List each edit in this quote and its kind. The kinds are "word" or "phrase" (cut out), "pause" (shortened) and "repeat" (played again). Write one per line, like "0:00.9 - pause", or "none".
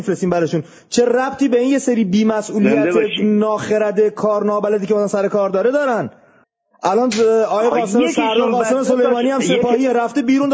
0:06.4 - pause